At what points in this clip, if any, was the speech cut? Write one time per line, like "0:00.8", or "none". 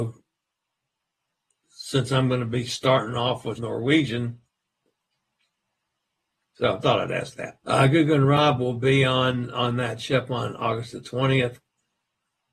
0:03.6
0:06.8
0:07.6